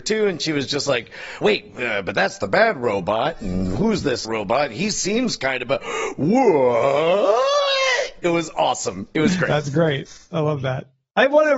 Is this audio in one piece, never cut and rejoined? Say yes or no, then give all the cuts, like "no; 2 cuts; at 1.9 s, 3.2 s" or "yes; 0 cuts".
no; 2 cuts; at 1.4 s, 4.2 s